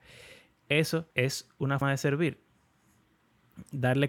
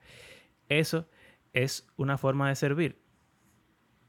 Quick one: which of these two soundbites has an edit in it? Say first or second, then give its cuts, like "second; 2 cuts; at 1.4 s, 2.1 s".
first; 2 cuts; at 1.1 s, 1.8 s